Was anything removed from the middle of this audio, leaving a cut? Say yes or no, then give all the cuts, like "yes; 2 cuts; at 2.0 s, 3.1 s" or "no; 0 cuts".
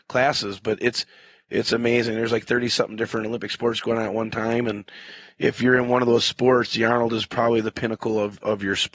no; 0 cuts